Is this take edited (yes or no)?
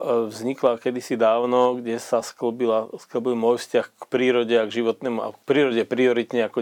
no